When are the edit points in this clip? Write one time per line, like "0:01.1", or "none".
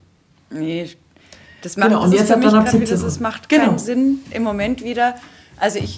none